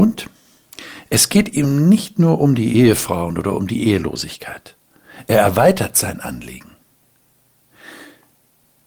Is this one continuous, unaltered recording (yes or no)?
yes